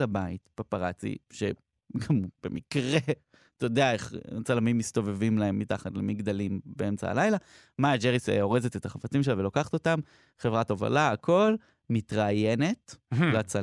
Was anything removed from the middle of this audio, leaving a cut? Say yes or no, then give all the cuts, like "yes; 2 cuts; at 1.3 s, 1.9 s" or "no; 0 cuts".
no; 0 cuts